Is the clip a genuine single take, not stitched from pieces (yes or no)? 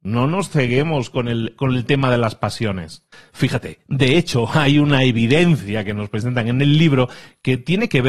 yes